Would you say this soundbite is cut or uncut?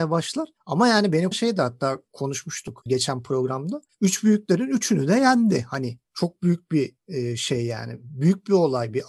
cut